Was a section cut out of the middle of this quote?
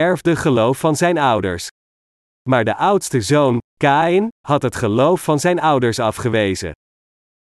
no; 0 cuts

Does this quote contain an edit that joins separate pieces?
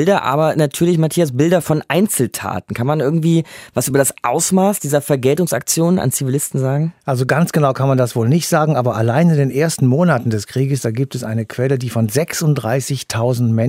no; 0 cuts

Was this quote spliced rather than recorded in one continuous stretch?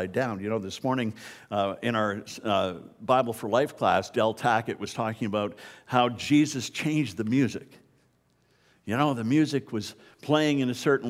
no; 0 cuts

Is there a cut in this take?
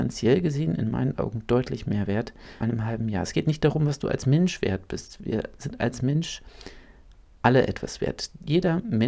yes; 1 cut; at 2.6 s

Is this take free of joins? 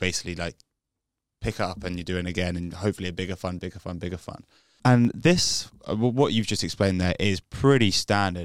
yes; 0 cuts

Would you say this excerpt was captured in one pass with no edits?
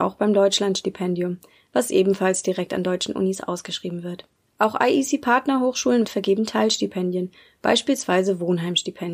no; 2 cuts; at 4.4 s, 6.0 s

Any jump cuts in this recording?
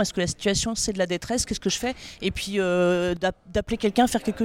no; 0 cuts

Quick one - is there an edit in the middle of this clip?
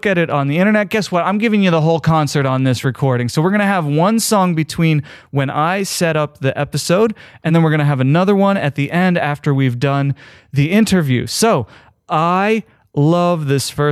no; 0 cuts

